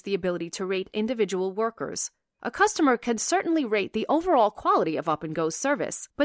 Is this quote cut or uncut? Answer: uncut